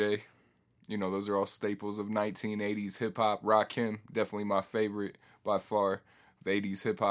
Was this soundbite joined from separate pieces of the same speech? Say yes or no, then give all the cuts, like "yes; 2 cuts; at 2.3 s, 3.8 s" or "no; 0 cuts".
no; 0 cuts